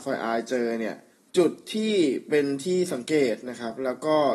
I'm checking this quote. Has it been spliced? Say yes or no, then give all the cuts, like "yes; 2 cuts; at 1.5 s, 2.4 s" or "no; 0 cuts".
yes; 1 cut; at 1.1 s